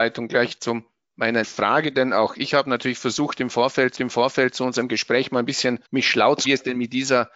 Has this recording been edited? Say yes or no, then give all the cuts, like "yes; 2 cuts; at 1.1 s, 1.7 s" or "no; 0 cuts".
yes; 4 cuts; at 1.4 s, 3.9 s, 5.8 s, 6.4 s